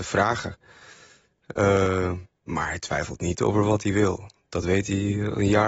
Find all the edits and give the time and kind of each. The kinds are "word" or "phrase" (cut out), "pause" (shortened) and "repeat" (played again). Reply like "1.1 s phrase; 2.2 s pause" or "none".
none